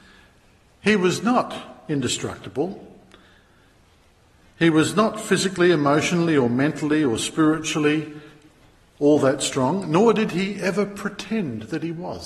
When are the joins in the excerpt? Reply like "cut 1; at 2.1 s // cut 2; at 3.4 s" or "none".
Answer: none